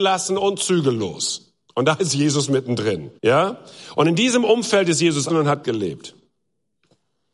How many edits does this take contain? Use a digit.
4